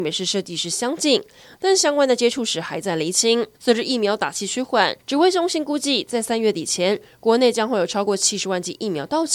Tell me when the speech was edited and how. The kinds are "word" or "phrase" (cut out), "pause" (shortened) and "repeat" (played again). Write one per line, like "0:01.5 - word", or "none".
0:03.5 - pause
0:05.0 - pause